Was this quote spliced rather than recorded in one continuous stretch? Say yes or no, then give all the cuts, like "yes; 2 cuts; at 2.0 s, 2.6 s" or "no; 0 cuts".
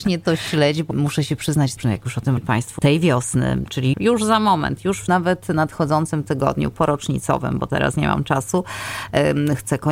yes; 6 cuts; at 0.9 s, 1.8 s, 2.4 s, 2.8 s, 3.9 s, 5.1 s